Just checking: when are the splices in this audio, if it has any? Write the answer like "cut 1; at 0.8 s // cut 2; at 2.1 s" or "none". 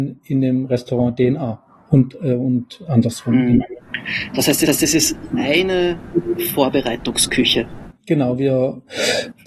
cut 1; at 4.7 s